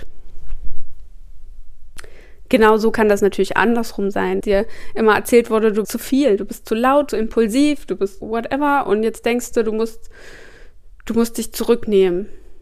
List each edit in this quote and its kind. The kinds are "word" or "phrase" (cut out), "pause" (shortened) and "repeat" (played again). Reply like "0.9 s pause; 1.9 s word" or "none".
4.4 s word; 5.8 s word; 7.1 s phrase; 8.2 s word